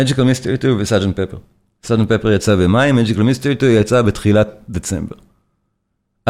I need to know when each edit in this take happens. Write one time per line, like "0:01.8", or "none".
none